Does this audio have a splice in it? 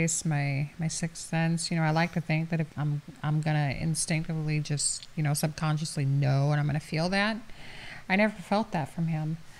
yes; 1 cut; at 2.7 s

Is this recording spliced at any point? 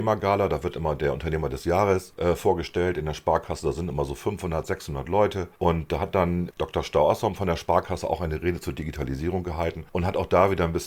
yes; 1 cut; at 6.5 s

